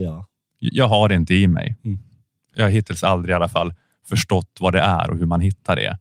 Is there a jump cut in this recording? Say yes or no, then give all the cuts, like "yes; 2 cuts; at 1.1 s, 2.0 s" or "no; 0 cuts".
no; 0 cuts